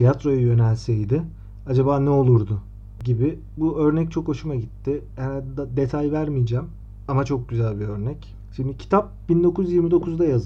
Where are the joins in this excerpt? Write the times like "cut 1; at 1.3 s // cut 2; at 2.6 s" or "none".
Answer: none